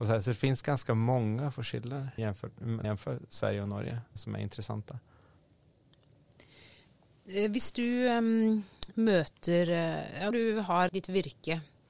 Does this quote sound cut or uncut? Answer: cut